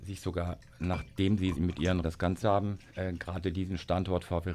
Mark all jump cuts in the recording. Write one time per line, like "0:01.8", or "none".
0:01.5
0:02.0
0:02.4
0:02.9